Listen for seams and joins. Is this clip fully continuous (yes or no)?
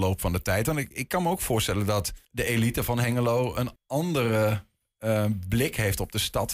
no